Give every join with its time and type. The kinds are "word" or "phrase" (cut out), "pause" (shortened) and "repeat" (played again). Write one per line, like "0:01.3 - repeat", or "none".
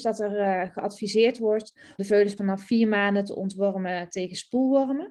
0:02.0 - word
0:02.4 - word